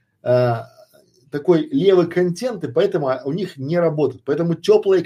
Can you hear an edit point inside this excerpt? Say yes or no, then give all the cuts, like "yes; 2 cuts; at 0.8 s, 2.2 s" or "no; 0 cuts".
no; 0 cuts